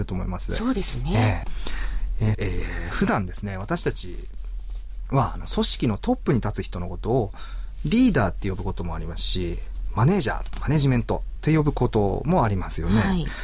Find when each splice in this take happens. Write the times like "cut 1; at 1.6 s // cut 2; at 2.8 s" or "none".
cut 1; at 2.3 s